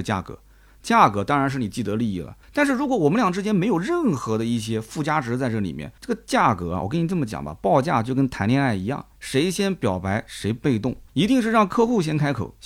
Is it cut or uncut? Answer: cut